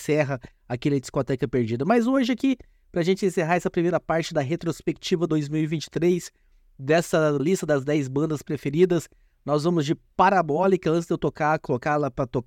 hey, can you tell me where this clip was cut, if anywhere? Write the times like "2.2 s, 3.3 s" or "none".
7.4 s